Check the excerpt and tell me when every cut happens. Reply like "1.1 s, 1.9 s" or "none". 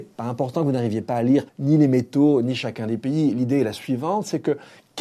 1.5 s